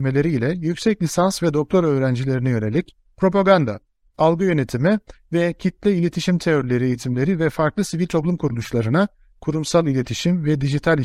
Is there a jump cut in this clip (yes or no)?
no